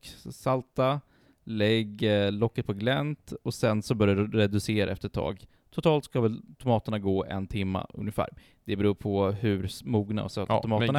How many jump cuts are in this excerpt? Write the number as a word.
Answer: zero